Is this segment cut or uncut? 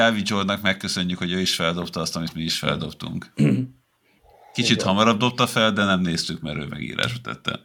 uncut